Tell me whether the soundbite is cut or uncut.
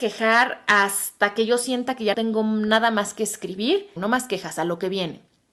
cut